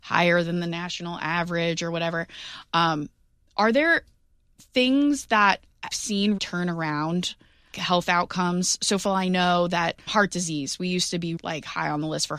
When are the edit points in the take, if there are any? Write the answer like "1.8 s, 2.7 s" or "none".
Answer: 5.9 s, 6.4 s, 7.7 s, 9.0 s, 10.1 s, 11.4 s